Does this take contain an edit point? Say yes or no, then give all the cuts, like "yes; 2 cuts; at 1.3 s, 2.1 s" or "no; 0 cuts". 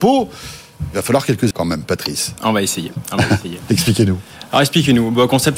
yes; 1 cut; at 1.5 s